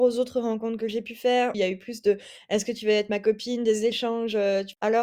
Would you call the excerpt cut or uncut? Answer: cut